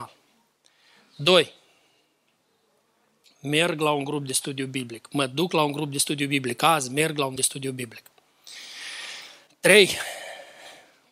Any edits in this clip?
yes; 2 cuts; at 7.4 s, 9.5 s

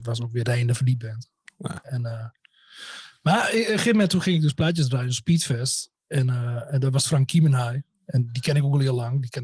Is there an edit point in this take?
no; 0 cuts

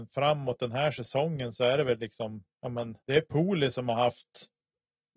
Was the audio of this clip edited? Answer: yes; 2 cuts; at 2.5 s, 3.0 s

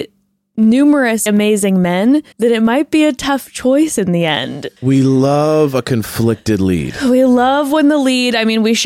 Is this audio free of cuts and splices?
no; 3 cuts; at 1.3 s, 2.3 s, 4.8 s

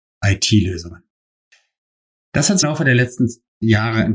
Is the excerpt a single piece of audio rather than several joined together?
no; 1 cut; at 2.6 s

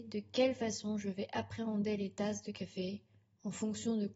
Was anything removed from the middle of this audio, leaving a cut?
no; 0 cuts

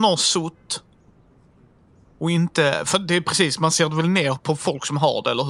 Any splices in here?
no; 0 cuts

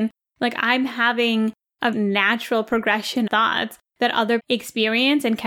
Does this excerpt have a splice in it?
yes; 3 cuts; at 1.9 s, 3.3 s, 4.4 s

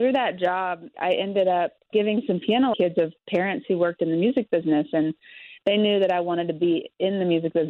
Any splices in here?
yes; 3 cuts; at 0.9 s, 1.9 s, 2.7 s

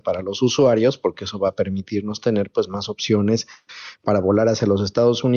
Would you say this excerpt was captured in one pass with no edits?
yes; 0 cuts

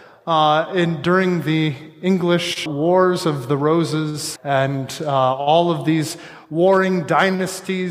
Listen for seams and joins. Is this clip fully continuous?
no; 2 cuts; at 2.7 s, 4.4 s

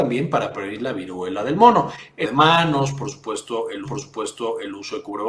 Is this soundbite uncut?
no; 2 cuts; at 2.2 s, 3.8 s

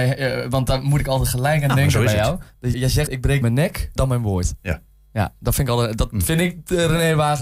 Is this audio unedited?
no; 4 cuts; at 2.7 s, 3.1 s, 3.4 s, 4.0 s

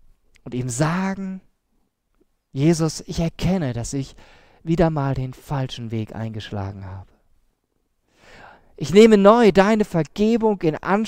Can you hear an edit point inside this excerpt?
no; 0 cuts

